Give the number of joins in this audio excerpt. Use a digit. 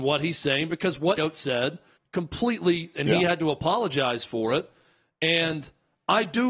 3